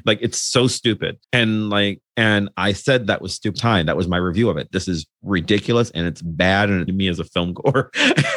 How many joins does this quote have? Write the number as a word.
three